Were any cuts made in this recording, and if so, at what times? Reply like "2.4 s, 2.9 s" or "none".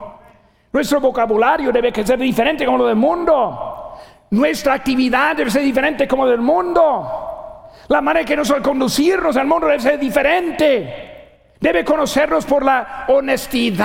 11.5 s